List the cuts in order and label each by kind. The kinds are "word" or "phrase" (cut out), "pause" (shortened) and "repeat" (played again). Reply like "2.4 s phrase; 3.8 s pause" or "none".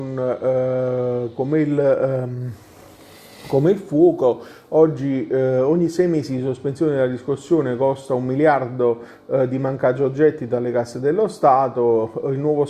none